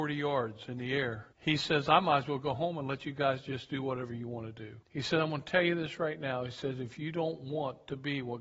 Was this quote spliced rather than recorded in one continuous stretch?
yes; 2 cuts; at 1.3 s, 4.8 s

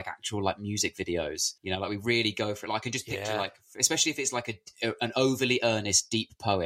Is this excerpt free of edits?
no; 1 cut; at 1.6 s

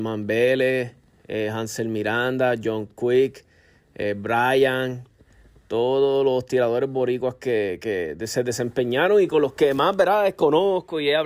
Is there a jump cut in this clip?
no; 0 cuts

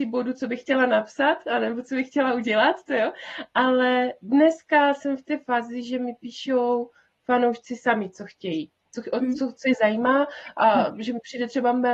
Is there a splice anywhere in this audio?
no; 0 cuts

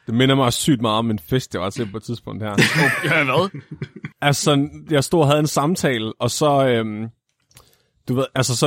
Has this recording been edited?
yes; 1 cut; at 4.1 s

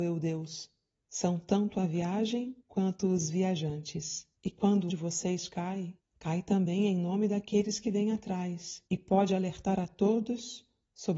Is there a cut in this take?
yes; 6 cuts; at 1.0 s, 2.6 s, 4.4 s, 4.9 s, 6.0 s, 8.9 s

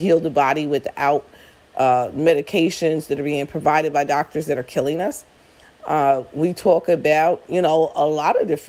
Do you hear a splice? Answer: no; 0 cuts

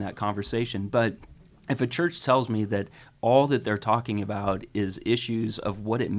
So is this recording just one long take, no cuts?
yes; 0 cuts

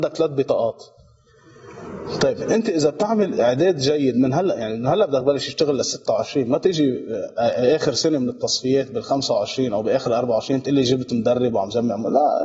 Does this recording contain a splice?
no; 0 cuts

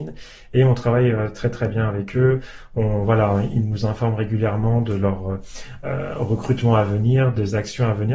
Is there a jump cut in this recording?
no; 0 cuts

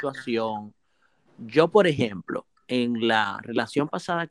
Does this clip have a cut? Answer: no; 0 cuts

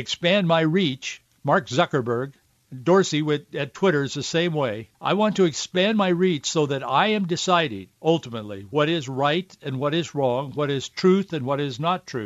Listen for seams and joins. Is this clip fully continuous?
no; 3 cuts; at 2.5 s, 4.9 s, 7.9 s

